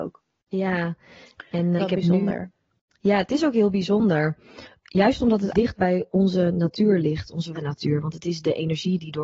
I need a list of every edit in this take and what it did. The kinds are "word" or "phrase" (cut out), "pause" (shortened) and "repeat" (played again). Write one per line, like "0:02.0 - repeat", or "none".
0:01.8 - word
0:05.5 - phrase
0:07.5 - word